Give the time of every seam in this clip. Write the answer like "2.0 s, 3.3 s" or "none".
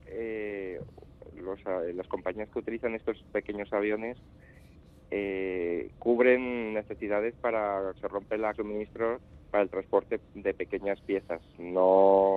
1.3 s, 8.0 s, 8.5 s, 9.4 s